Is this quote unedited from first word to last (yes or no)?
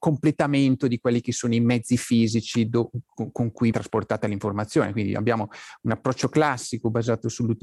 no